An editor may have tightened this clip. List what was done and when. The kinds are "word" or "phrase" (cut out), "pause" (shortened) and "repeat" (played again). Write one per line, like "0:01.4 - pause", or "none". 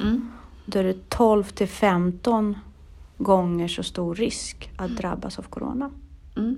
none